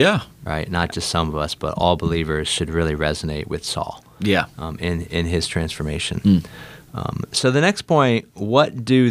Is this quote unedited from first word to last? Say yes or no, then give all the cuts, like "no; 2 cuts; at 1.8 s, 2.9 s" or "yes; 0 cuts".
yes; 0 cuts